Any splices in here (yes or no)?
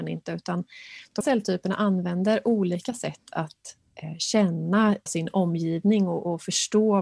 yes